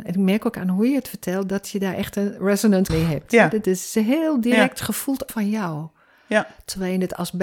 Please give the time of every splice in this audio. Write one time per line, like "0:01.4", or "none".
0:02.9
0:05.3